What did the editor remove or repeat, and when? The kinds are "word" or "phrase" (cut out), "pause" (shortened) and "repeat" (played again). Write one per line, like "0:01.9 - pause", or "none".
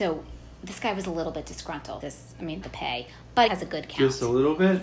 0:02.0 - phrase
0:02.6 - word
0:03.5 - phrase